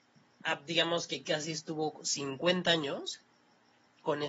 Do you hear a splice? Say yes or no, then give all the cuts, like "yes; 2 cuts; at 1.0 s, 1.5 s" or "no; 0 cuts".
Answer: yes; 1 cut; at 1.2 s